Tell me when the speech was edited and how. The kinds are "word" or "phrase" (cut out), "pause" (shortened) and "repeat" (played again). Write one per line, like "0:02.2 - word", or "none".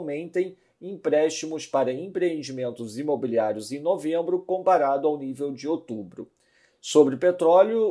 none